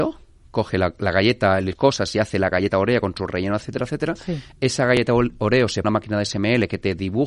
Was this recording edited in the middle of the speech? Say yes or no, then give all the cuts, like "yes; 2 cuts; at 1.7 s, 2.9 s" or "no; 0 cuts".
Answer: yes; 2 cuts; at 1.8 s, 5.8 s